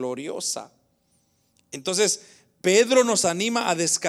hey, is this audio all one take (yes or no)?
yes